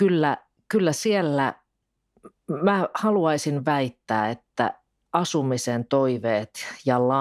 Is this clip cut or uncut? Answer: uncut